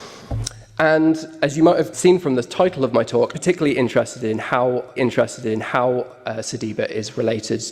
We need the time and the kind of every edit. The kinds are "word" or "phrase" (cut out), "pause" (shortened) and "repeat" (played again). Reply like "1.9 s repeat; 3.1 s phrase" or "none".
1.9 s word; 3.3 s word; 5.0 s repeat